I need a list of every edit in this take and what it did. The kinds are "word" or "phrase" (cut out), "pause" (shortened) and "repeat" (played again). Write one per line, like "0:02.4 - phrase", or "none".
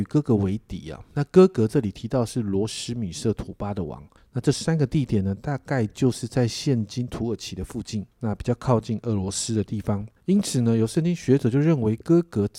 0:01.1 - pause
0:04.2 - pause
0:08.1 - pause
0:10.2 - pause